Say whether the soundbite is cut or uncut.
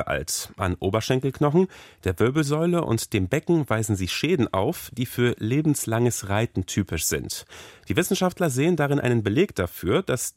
uncut